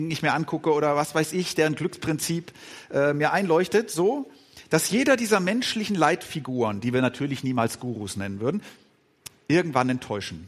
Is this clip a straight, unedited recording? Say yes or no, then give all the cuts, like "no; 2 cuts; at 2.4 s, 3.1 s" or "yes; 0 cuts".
yes; 0 cuts